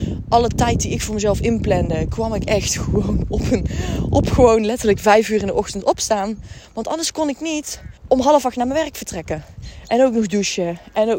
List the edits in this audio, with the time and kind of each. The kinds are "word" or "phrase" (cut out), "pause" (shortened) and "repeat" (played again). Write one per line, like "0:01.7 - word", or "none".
0:08.0 - pause